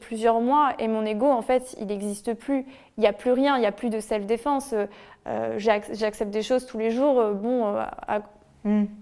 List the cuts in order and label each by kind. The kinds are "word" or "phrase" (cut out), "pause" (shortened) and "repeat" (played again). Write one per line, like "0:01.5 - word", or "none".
none

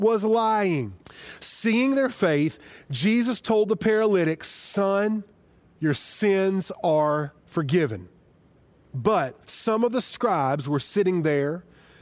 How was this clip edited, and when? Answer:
0:01.0 - pause
0:05.5 - pause
0:07.4 - pause
0:09.4 - pause

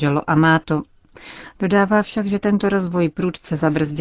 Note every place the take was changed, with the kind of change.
none

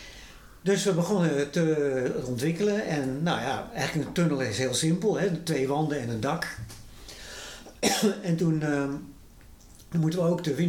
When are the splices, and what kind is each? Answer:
none

